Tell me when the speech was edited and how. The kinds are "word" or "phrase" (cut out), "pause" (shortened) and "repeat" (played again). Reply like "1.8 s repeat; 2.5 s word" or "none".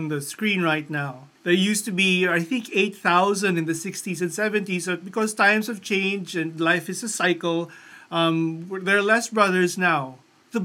1.4 s pause